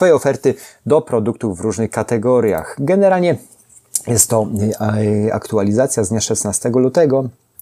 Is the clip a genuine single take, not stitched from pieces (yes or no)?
yes